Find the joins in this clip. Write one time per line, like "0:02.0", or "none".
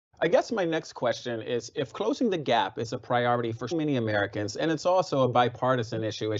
0:03.7

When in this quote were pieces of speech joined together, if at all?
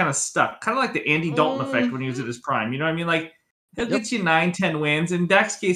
none

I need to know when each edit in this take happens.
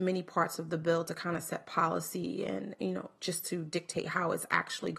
none

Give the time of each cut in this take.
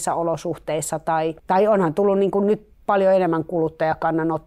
0:01.4

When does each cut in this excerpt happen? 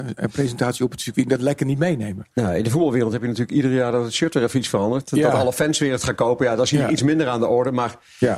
none

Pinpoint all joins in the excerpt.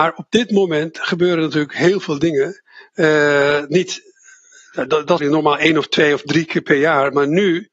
0:05.2

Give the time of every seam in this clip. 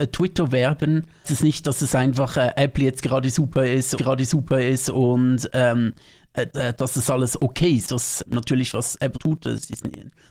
0:01.2
0:04.0
0:06.5
0:08.3
0:09.1

